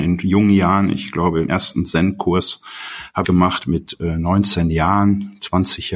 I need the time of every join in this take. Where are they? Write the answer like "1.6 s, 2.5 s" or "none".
1.5 s, 3.2 s